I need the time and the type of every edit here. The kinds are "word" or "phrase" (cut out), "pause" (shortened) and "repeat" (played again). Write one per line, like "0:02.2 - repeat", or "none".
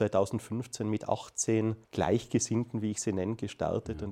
0:01.8 - pause